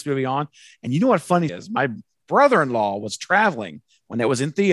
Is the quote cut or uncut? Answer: cut